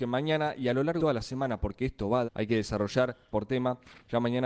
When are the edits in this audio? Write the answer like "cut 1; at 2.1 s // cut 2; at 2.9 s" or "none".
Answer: cut 1; at 1.0 s // cut 2; at 2.3 s // cut 3; at 3.3 s

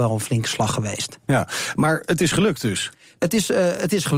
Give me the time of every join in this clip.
none

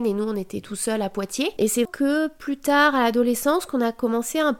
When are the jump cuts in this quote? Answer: cut 1; at 1.8 s

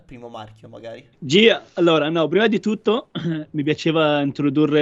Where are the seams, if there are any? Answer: cut 1; at 1.1 s

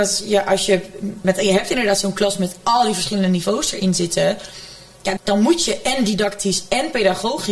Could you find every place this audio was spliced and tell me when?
cut 1; at 1.2 s // cut 2; at 5.2 s

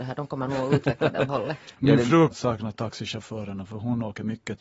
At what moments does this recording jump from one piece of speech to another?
cut 1; at 1.3 s // cut 2; at 2.3 s

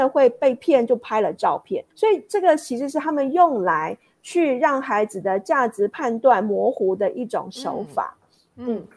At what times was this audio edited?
cut 1; at 1.9 s

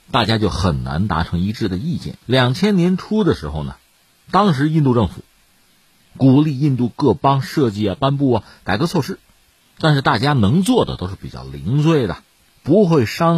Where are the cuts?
cut 1; at 2.2 s

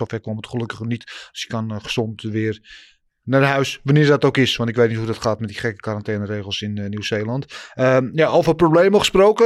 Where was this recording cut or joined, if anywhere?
none

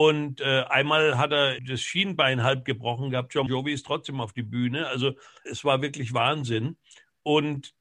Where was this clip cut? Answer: cut 1; at 1.6 s // cut 2; at 3.5 s // cut 3; at 5.5 s

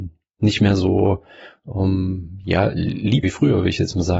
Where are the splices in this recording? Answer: cut 1; at 3.2 s

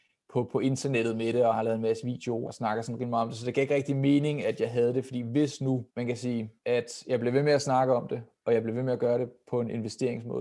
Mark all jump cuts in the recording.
cut 1; at 1.5 s // cut 2; at 2.5 s // cut 3; at 5.9 s // cut 4; at 6.6 s

